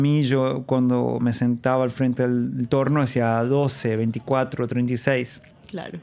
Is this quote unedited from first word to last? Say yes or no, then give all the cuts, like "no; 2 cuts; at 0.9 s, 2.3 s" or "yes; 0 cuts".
yes; 0 cuts